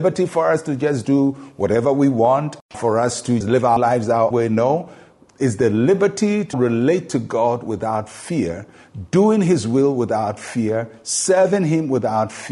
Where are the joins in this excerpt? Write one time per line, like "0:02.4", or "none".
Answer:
0:02.7
0:03.4
0:03.8
0:04.3
0:06.5